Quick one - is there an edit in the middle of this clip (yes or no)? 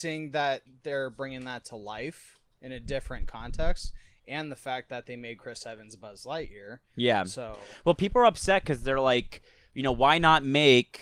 no